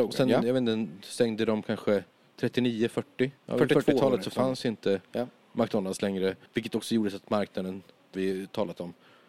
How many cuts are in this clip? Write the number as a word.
three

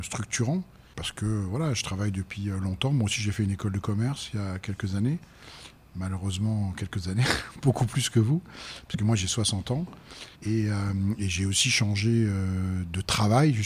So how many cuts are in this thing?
one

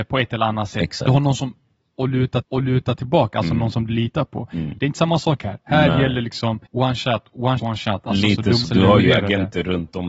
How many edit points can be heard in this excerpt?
four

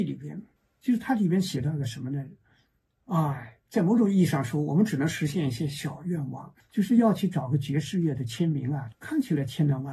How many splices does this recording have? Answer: zero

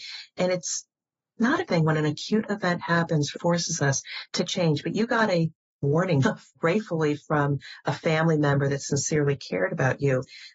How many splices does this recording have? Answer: four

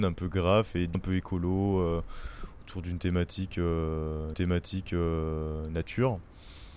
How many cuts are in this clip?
two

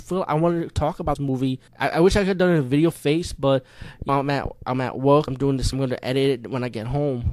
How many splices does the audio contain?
six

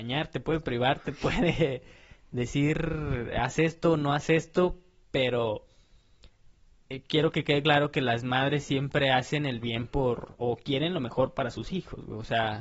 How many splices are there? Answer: zero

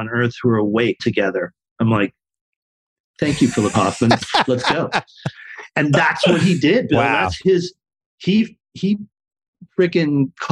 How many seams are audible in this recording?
two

